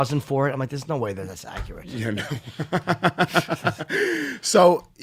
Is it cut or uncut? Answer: uncut